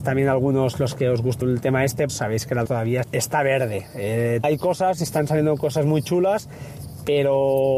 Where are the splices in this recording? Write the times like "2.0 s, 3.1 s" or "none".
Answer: 1.4 s, 2.1 s, 2.7 s, 3.0 s, 4.4 s, 5.0 s